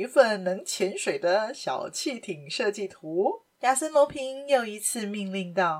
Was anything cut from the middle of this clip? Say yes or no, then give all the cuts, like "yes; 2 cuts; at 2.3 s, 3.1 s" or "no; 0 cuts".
yes; 1 cut; at 3.5 s